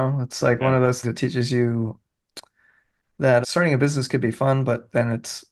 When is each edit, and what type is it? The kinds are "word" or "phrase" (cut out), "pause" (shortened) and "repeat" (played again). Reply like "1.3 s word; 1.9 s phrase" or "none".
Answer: 1.0 s word; 3.4 s word